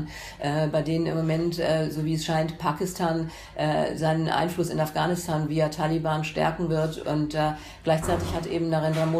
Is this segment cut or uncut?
uncut